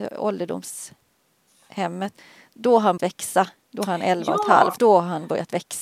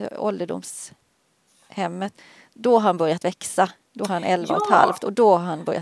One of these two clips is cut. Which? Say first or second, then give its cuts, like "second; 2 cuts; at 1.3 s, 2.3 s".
first; 2 cuts; at 3.0 s, 4.8 s